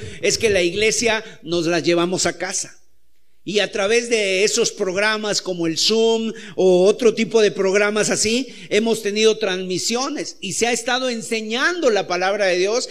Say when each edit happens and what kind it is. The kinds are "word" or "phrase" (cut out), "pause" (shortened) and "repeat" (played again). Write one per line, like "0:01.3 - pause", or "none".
none